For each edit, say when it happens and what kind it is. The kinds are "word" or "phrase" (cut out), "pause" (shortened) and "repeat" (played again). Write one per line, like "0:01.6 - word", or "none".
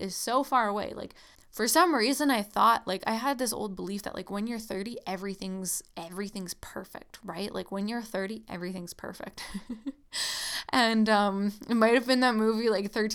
0:01.3 - pause